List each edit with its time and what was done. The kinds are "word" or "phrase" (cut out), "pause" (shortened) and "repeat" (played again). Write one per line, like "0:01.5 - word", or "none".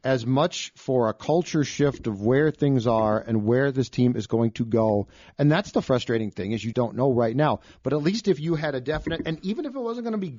0:06.7 - word